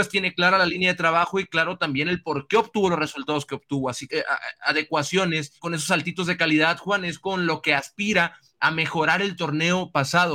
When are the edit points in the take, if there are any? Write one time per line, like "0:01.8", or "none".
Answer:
0:04.1
0:05.6